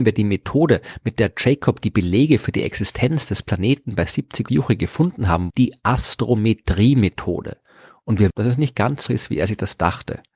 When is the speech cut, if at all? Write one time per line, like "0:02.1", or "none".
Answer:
0:04.5
0:05.5
0:08.3
0:09.1